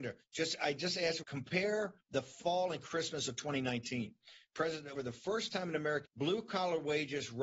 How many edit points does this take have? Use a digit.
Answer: 4